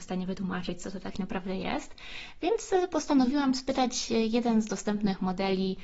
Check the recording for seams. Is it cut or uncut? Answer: uncut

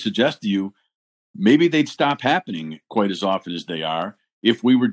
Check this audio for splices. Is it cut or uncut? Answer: uncut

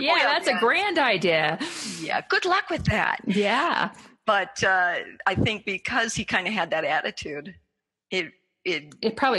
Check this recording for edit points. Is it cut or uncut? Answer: uncut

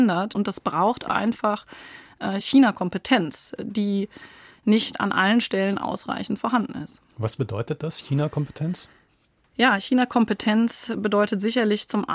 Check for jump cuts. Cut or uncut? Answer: uncut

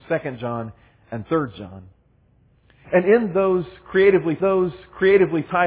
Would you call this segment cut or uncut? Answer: cut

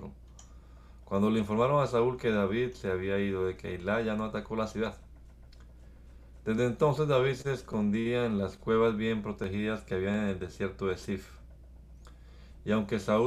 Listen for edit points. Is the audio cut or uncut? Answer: uncut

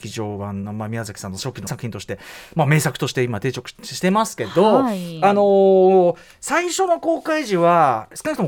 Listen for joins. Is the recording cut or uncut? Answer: cut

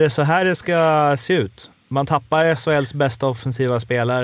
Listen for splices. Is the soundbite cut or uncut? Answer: uncut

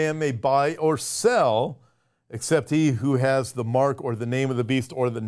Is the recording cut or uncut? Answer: uncut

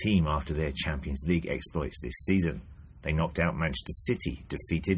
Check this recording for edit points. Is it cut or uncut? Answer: uncut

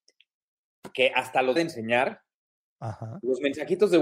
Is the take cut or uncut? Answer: cut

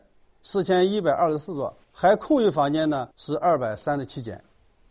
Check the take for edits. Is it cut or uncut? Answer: cut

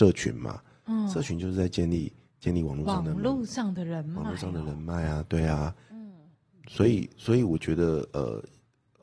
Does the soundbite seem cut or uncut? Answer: uncut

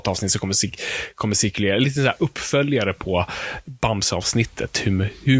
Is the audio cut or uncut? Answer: uncut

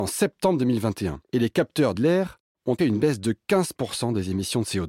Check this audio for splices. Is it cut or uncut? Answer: cut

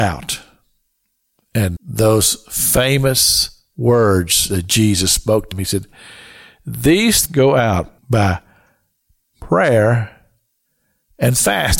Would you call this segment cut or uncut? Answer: cut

